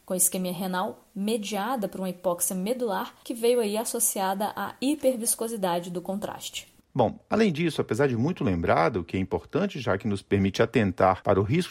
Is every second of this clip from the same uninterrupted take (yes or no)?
yes